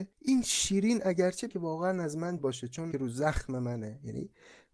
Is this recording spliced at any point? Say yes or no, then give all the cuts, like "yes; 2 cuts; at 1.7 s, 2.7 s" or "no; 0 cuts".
yes; 3 cuts; at 1.5 s, 2.4 s, 2.9 s